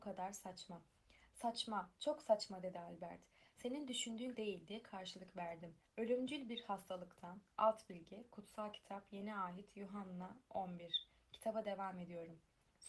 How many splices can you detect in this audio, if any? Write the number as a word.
one